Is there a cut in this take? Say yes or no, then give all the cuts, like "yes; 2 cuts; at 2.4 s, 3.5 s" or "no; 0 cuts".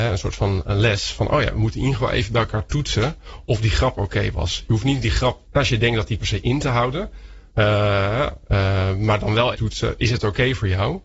yes; 4 cuts; at 5.4 s, 6.2 s, 7.5 s, 9.5 s